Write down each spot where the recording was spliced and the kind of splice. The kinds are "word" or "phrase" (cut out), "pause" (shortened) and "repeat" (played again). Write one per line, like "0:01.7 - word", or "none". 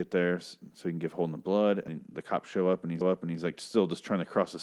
0:01.9 - word
0:03.0 - repeat